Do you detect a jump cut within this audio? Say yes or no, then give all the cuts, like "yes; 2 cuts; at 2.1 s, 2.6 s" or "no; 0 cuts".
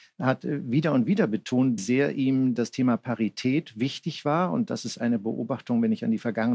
yes; 1 cut; at 1.8 s